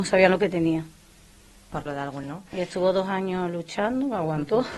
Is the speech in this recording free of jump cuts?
no; 2 cuts; at 1.9 s, 2.2 s

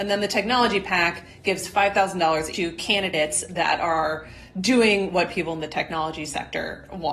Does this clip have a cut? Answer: yes; 1 cut; at 2.5 s

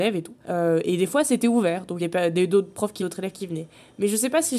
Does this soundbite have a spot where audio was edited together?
yes; 2 cuts; at 2.0 s, 3.0 s

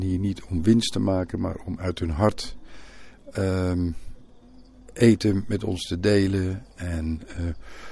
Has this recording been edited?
no; 0 cuts

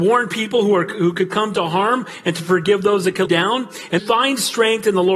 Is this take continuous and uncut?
no; 2 cuts; at 3.3 s, 4.0 s

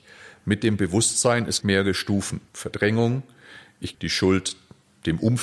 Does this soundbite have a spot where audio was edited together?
yes; 3 cuts; at 1.6 s, 2.5 s, 3.9 s

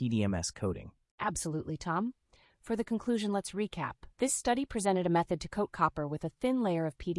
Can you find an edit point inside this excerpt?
yes; 1 cut; at 4.1 s

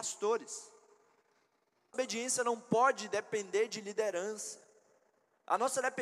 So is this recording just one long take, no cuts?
no; 1 cut; at 1.9 s

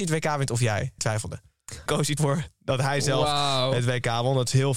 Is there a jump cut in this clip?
yes; 3 cuts; at 1.0 s, 1.9 s, 2.2 s

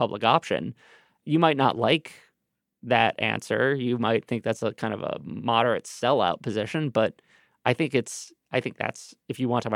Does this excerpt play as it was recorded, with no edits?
yes; 0 cuts

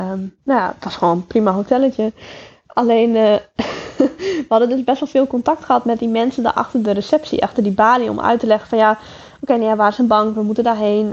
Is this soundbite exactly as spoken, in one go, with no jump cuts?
yes; 0 cuts

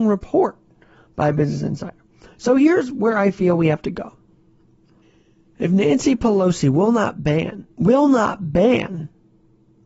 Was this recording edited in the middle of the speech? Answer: yes; 2 cuts; at 5.0 s, 7.7 s

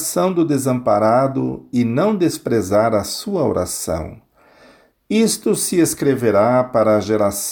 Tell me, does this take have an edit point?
no; 0 cuts

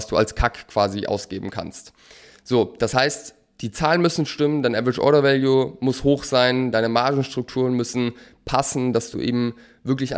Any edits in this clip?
no; 0 cuts

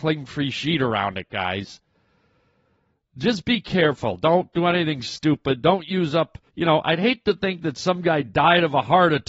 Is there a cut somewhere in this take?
yes; 2 cuts; at 4.5 s, 6.5 s

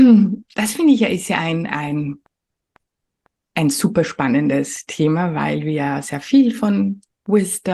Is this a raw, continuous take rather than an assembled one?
yes; 0 cuts

